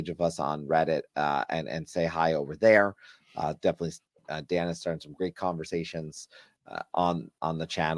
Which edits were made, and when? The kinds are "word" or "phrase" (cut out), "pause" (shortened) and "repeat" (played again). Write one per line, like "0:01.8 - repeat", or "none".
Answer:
none